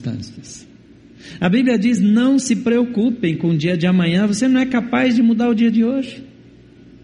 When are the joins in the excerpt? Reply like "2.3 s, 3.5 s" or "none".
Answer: none